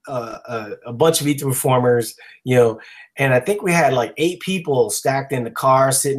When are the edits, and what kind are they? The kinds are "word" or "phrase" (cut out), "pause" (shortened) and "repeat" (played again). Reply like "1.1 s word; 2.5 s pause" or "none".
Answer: none